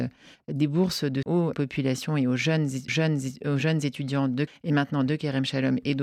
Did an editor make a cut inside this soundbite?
yes; 4 cuts; at 1.2 s, 1.5 s, 2.9 s, 4.5 s

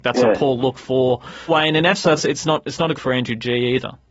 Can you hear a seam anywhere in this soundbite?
yes; 3 cuts; at 1.5 s, 2.2 s, 2.9 s

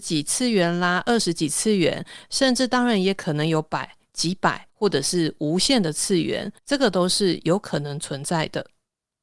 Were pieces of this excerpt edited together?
yes; 2 cuts; at 4.7 s, 6.6 s

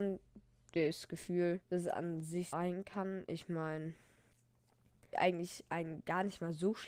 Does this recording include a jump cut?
yes; 3 cuts; at 1.6 s, 2.5 s, 5.1 s

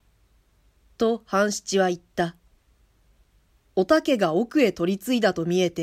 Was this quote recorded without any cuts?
yes; 0 cuts

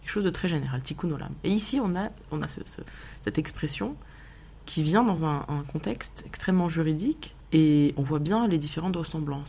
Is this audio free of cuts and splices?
yes; 0 cuts

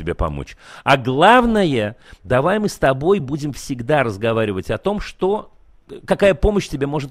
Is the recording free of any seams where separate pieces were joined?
yes; 0 cuts

